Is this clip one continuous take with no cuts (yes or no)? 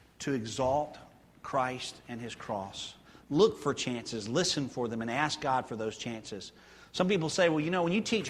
yes